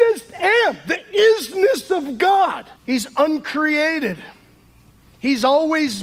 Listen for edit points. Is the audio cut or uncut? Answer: cut